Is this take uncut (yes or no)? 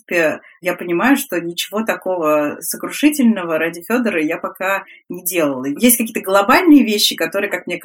yes